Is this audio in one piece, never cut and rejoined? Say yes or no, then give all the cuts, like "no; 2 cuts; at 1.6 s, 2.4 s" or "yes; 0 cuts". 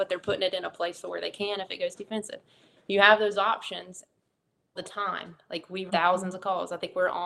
no; 2 cuts; at 4.8 s, 5.9 s